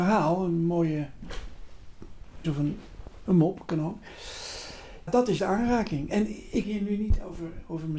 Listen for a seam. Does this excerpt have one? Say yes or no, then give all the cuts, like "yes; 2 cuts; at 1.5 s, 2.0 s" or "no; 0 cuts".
yes; 4 cuts; at 2.4 s, 5.1 s, 5.4 s, 6.6 s